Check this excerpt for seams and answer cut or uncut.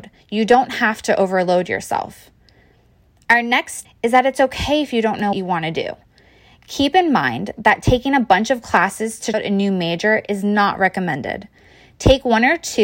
cut